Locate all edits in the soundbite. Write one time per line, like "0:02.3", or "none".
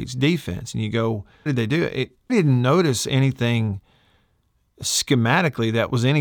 0:01.5
0:02.3